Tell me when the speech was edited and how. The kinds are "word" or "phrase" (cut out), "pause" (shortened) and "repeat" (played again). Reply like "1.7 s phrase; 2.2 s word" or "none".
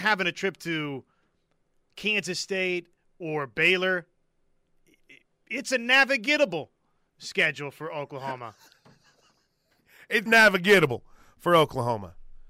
10.3 s word